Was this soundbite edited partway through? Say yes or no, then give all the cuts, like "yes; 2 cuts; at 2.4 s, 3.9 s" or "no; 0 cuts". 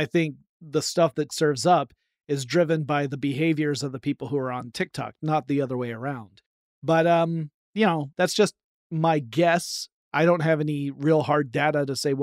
yes; 1 cut; at 1.3 s